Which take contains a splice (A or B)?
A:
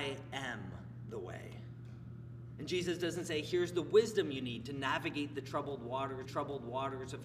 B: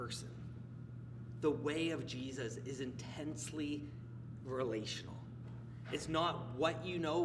A